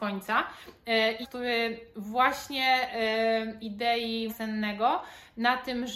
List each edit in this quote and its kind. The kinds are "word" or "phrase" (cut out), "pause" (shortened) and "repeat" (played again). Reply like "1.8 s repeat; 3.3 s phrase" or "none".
1.2 s phrase; 3.6 s phrase; 4.3 s word